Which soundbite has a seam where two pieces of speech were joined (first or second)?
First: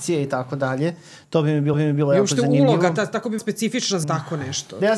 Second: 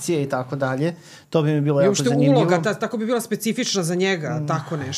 first